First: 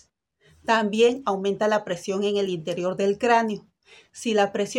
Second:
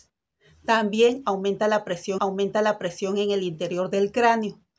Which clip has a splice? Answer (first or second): second